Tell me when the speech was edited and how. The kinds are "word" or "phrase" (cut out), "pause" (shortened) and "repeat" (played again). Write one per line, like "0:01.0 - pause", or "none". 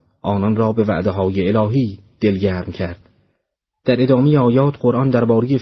0:03.6 - pause

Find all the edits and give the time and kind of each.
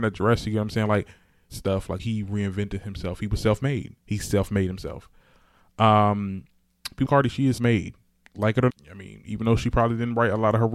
0:01.5 - phrase
0:02.0 - word
0:04.0 - pause
0:07.1 - word
0:07.6 - word
0:08.7 - word

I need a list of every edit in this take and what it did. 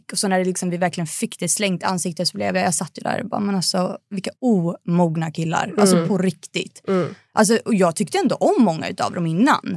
0:04.3 - pause

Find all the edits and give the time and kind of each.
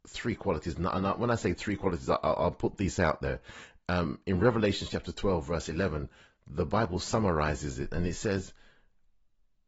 none

